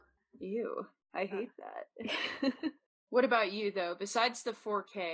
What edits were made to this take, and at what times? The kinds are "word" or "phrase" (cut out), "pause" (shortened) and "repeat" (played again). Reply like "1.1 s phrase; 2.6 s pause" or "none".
none

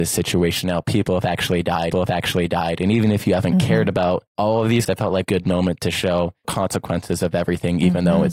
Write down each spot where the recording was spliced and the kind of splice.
1.9 s repeat; 4.3 s pause; 4.9 s word; 5.2 s phrase; 6.4 s phrase

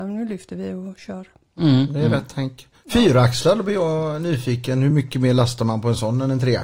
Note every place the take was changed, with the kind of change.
none

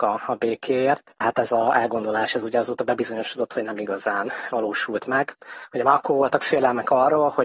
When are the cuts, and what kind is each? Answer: 1.2 s word

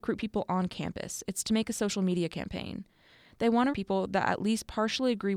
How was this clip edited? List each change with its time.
3.7 s word

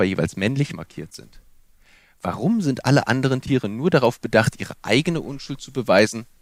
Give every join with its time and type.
none

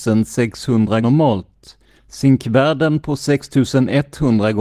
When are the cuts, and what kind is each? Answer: 1.0 s phrase; 2.0 s pause

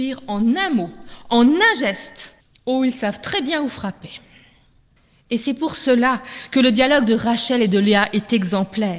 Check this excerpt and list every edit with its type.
2.4 s pause; 5.0 s pause

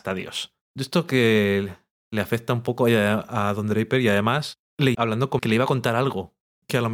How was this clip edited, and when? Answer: 4.9 s word; 5.4 s word

